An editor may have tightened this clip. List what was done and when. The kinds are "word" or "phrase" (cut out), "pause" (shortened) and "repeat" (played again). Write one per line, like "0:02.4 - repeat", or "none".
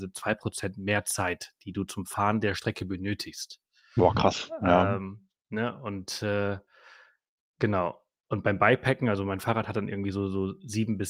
none